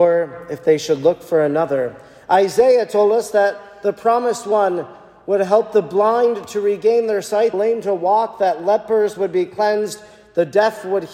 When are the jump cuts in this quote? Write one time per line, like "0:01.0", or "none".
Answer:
0:07.5